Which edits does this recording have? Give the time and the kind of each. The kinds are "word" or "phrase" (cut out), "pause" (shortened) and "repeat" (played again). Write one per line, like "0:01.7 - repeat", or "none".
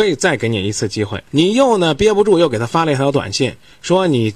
0:01.3 - pause